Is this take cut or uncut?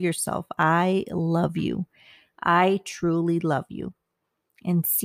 uncut